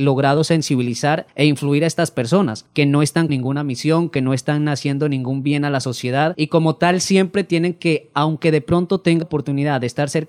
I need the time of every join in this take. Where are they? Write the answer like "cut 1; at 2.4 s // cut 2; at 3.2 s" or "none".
cut 1; at 3.3 s // cut 2; at 9.2 s